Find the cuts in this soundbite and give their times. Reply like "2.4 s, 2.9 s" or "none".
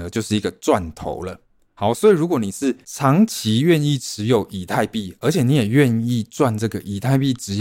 none